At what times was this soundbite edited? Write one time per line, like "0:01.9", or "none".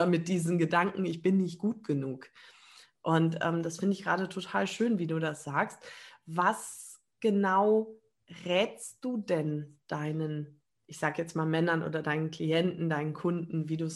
none

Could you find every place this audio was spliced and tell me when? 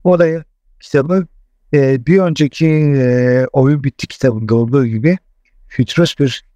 none

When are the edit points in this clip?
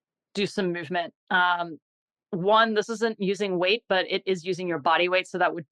none

